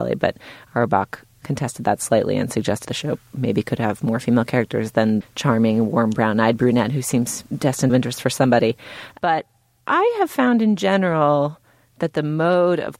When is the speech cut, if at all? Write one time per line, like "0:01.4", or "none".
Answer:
0:02.8
0:05.2
0:07.9